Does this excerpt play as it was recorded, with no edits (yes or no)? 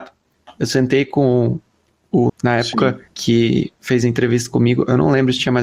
no